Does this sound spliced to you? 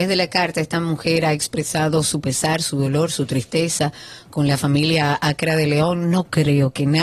no; 0 cuts

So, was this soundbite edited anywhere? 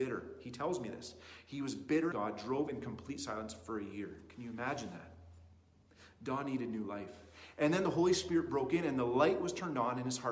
yes; 1 cut; at 2.1 s

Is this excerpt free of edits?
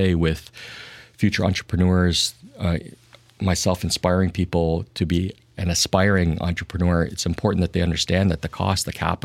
yes; 0 cuts

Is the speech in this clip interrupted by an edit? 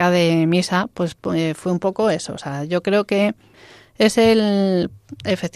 no; 0 cuts

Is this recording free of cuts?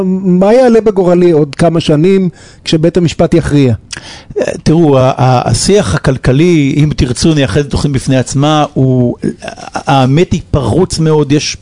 yes; 0 cuts

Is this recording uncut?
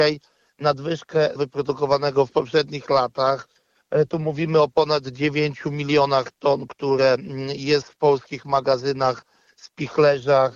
no; 1 cut; at 1.4 s

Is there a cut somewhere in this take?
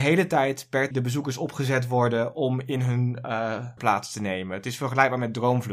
yes; 2 cuts; at 0.9 s, 3.8 s

